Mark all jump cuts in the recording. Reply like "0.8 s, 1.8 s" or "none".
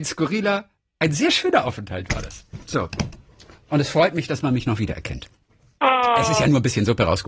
none